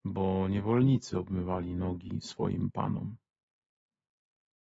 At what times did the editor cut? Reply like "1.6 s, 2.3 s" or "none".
none